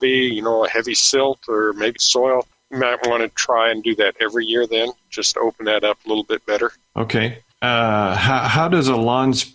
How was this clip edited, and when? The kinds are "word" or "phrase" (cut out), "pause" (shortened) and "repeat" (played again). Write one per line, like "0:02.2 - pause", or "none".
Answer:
0:02.0 - phrase